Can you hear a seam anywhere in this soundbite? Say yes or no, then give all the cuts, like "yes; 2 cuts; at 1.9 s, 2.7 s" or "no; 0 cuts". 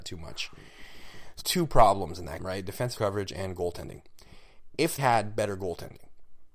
yes; 4 cuts; at 1.4 s, 2.4 s, 3.0 s, 5.0 s